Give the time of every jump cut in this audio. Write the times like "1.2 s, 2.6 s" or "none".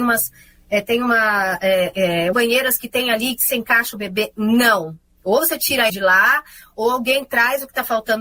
2.3 s, 5.9 s